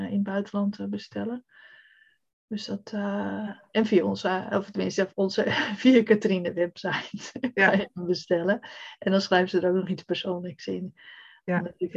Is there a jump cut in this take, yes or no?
no